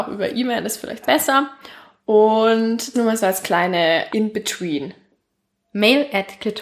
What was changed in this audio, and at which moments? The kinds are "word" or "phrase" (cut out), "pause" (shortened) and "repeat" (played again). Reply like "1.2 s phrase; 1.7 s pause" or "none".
1.0 s word; 2.9 s word; 4.1 s word

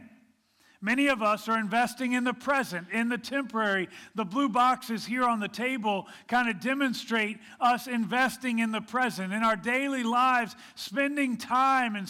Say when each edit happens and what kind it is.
none

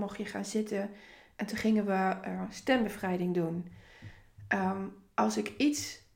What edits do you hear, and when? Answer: none

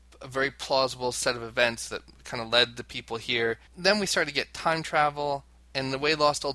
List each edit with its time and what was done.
3.7 s pause

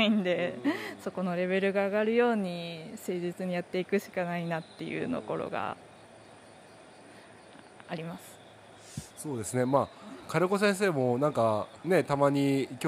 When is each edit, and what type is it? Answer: 11.8 s pause

